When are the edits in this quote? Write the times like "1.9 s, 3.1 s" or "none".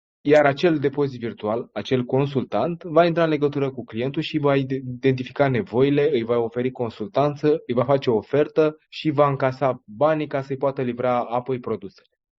8.8 s